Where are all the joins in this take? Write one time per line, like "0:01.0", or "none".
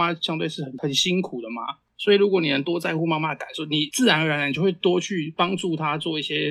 none

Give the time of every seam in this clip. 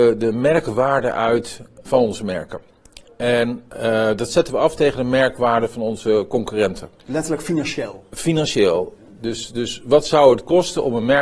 0:01.8
0:07.0

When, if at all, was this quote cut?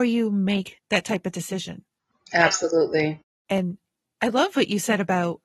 none

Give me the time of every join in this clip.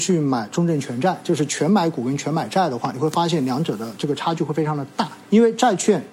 0:05.2

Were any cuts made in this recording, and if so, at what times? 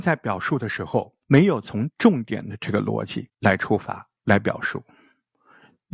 0:01.2

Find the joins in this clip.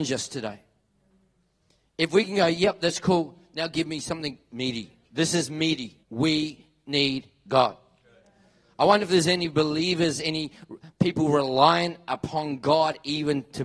0:05.0
0:06.0

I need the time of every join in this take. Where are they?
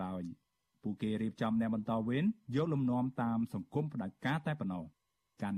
none

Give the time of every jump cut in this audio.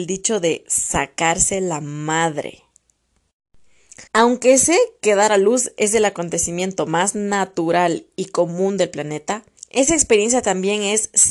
0:04.1
0:09.6

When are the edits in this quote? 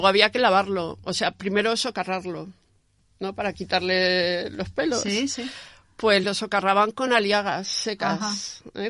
none

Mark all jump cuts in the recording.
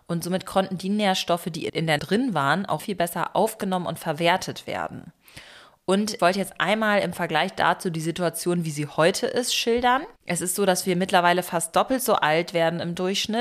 0:02.0
0:02.8
0:06.2
0:10.2

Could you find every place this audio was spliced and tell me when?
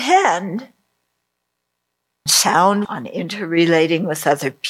0:02.3
0:02.8

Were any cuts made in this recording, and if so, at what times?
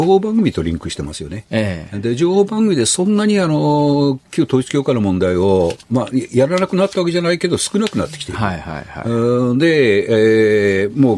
0:05.8

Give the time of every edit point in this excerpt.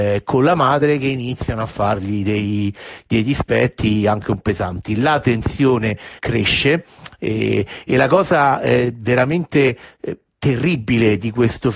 0:04.4
0:06.2

